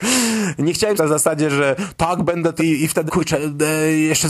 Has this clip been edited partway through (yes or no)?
yes